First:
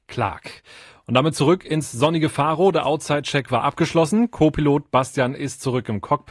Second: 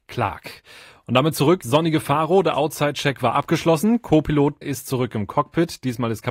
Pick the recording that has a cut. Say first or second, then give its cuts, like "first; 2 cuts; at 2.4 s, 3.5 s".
second; 2 cuts; at 1.6 s, 4.6 s